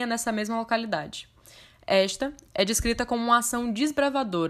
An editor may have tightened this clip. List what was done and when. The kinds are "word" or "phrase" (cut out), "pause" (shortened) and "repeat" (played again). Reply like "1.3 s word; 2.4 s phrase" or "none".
none